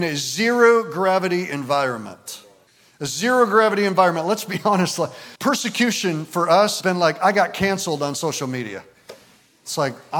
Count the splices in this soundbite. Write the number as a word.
three